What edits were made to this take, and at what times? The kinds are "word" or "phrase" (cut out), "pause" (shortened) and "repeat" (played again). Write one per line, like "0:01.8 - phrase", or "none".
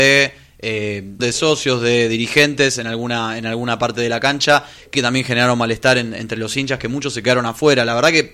0:01.2 - word
0:04.9 - word